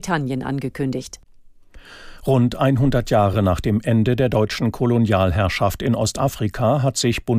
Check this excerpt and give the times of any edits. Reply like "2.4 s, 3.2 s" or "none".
none